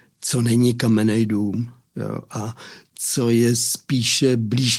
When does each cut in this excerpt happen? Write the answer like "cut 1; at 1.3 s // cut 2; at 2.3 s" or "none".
none